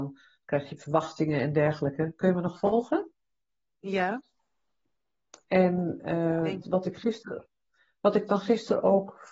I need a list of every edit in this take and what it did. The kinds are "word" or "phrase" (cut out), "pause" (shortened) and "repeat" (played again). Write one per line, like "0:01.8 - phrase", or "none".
0:06.6 - word